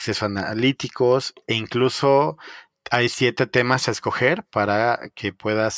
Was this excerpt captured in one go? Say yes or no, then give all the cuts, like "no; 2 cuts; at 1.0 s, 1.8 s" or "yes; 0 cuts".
no; 1 cut; at 1.4 s